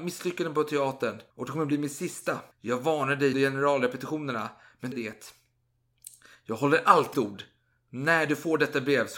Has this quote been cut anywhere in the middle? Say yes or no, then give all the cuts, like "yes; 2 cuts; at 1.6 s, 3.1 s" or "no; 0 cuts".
yes; 5 cuts; at 1.3 s, 2.5 s, 3.3 s, 4.9 s, 7.1 s